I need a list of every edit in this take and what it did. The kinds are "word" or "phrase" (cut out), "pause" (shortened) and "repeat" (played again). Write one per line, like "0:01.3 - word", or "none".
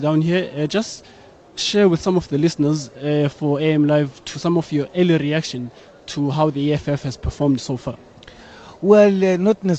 none

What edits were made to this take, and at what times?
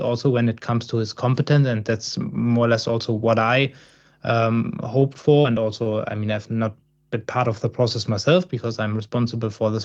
none

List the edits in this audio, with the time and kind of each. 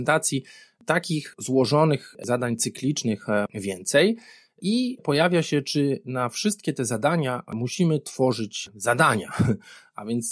0:03.5 - phrase
0:05.0 - word

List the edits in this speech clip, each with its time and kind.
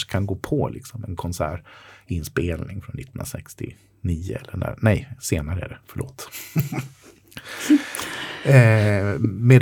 none

